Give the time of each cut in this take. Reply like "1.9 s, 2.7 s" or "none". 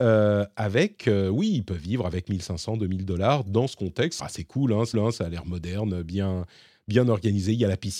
4.2 s, 4.9 s